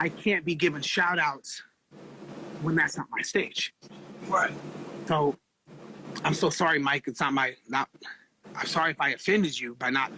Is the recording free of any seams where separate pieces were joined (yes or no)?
yes